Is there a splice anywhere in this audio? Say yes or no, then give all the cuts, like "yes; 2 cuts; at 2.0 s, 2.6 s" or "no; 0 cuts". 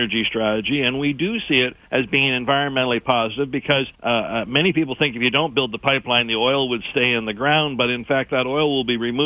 yes; 2 cuts; at 1.8 s, 3.9 s